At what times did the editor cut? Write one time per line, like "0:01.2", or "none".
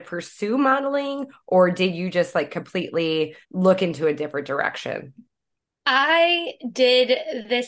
0:03.4
0:05.5